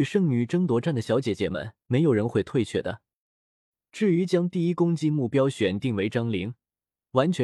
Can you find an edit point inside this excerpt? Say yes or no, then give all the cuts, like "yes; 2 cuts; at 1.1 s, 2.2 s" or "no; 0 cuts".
yes; 1 cut; at 1.8 s